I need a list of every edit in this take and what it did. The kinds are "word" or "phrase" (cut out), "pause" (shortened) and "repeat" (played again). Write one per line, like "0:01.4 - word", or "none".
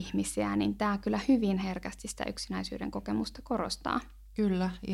none

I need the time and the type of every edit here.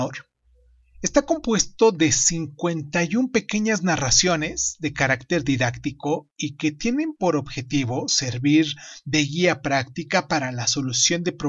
none

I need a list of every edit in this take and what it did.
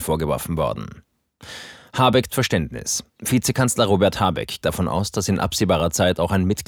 0:02.3 - word
0:03.1 - pause
0:04.6 - word

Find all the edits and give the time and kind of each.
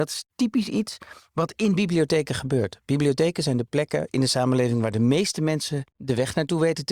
0:05.9 - pause

